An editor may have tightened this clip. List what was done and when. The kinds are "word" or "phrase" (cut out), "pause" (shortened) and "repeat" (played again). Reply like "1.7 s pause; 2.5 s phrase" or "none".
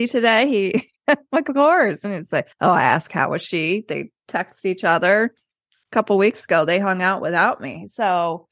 1.0 s pause; 2.5 s pause